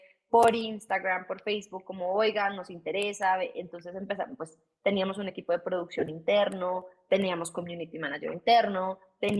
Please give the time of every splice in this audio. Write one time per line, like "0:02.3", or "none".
none